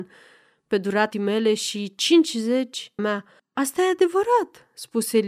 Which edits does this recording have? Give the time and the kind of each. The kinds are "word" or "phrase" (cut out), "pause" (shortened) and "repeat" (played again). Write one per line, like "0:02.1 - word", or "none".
0:01.1 - word
0:03.0 - phrase
0:03.4 - pause